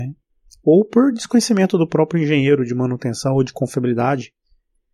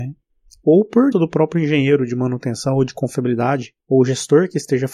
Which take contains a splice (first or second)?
second